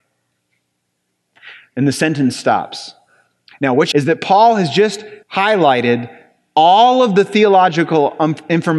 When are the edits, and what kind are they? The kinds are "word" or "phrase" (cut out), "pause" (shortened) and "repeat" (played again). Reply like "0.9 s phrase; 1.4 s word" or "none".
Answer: 3.9 s phrase; 5.2 s pause